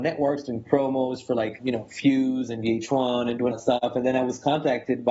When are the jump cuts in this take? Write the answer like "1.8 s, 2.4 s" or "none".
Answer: 1.6 s, 3.5 s